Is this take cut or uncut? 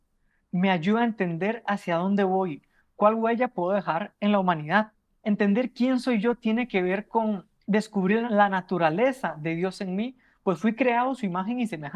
uncut